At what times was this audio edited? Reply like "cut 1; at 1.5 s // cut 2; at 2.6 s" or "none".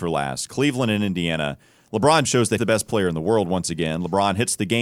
cut 1; at 2.2 s // cut 2; at 2.6 s